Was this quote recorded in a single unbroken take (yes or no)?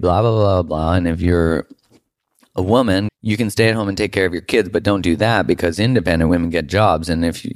no